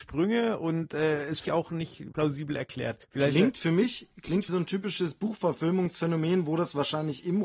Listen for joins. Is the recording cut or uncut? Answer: cut